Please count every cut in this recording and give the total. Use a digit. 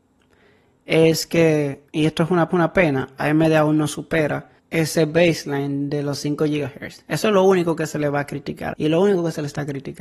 4